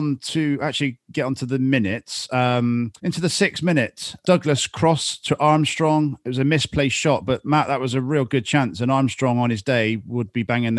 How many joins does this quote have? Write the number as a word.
two